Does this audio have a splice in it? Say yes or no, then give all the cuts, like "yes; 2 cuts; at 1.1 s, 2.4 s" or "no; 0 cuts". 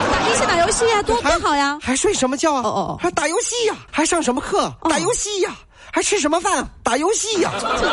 yes; 1 cut; at 3.9 s